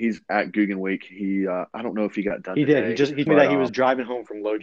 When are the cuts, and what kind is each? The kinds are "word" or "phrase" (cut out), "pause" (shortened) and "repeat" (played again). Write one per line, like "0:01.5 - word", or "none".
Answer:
0:03.3 - word
0:03.7 - word